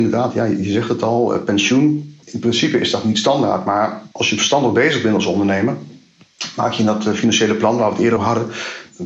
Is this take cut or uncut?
cut